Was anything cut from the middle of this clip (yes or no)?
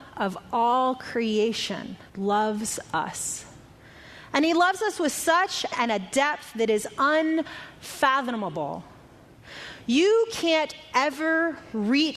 yes